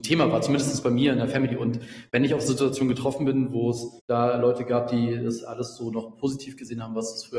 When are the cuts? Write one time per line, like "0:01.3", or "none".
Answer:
0:04.0